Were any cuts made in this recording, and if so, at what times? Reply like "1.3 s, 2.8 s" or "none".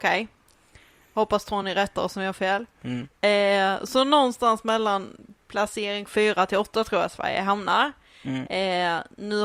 none